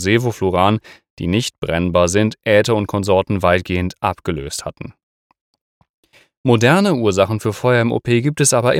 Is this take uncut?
yes; 0 cuts

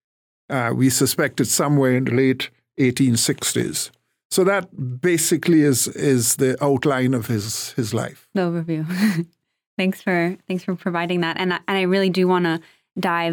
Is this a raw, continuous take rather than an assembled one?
yes; 0 cuts

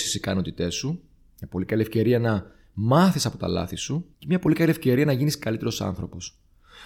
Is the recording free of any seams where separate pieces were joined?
no; 1 cut; at 4.1 s

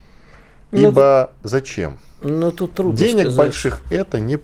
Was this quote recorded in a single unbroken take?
yes; 0 cuts

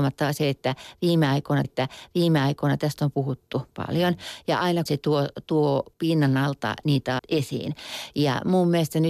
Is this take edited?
yes; 4 cuts; at 1.6 s, 4.9 s, 5.9 s, 7.2 s

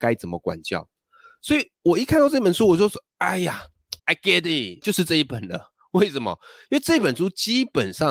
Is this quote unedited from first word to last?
no; 3 cuts; at 1.8 s, 4.0 s, 4.8 s

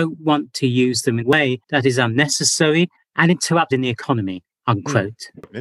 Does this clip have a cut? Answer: yes; 5 cuts; at 1.2 s, 1.6 s, 3.0 s, 3.7 s, 4.5 s

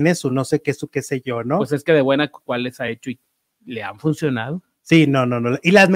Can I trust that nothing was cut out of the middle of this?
yes; 0 cuts

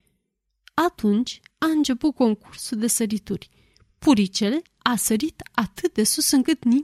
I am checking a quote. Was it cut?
yes; 2 cuts; at 1.5 s, 4.7 s

